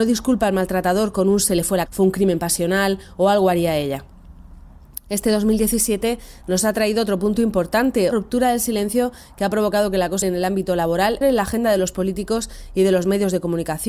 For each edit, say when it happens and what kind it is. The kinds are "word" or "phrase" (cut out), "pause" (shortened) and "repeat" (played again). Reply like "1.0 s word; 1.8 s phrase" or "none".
1.9 s word; 8.1 s word; 10.2 s word; 11.2 s word